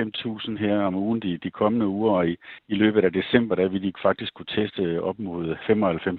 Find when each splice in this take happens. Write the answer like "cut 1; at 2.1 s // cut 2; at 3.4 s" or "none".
cut 1; at 2.6 s